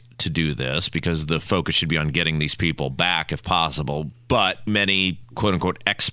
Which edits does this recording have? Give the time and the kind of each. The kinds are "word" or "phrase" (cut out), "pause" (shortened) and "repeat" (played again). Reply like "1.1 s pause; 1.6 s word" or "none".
4.7 s word